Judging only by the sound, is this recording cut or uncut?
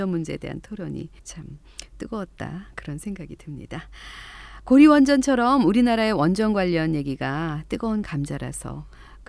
cut